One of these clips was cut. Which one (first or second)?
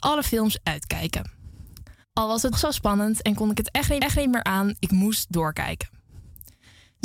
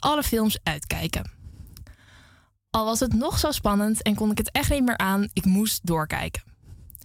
first